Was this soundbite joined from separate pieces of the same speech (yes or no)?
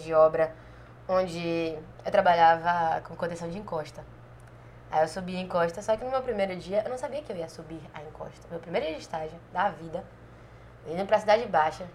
no